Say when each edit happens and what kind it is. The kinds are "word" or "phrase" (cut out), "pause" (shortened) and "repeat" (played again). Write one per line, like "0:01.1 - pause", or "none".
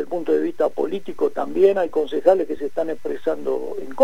none